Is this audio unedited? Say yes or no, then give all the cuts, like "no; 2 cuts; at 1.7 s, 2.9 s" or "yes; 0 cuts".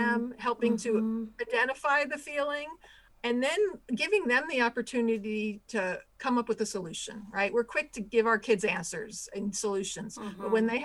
yes; 0 cuts